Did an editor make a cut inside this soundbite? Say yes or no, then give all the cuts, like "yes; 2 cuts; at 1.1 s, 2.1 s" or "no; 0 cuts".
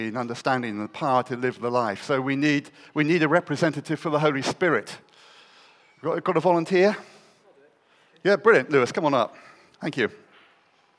no; 0 cuts